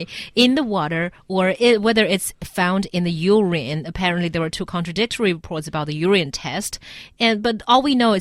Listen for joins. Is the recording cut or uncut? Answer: uncut